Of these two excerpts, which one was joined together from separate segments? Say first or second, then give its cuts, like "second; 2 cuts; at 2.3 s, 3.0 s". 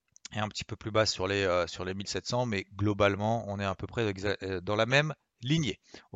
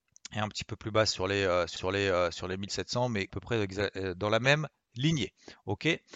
second; 2 cuts; at 1.8 s, 3.3 s